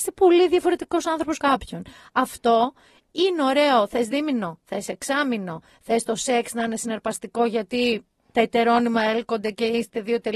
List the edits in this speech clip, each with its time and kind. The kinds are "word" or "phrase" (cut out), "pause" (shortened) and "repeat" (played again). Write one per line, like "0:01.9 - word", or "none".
0:01.4 - word